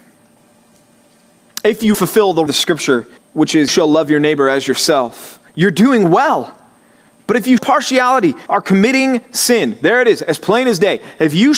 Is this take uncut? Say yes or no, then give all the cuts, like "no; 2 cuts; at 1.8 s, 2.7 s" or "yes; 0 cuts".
no; 7 cuts; at 1.9 s, 2.5 s, 3.2 s, 3.7 s, 5.5 s, 7.6 s, 8.5 s